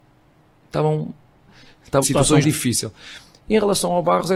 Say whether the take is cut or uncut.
cut